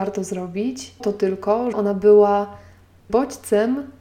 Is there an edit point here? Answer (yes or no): yes